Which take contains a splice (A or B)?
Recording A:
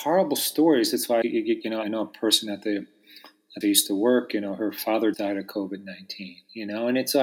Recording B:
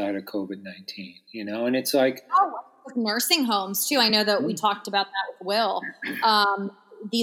A